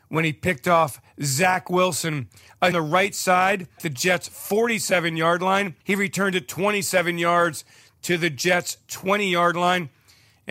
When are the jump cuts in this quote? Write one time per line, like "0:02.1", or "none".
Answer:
0:02.7
0:03.8
0:05.8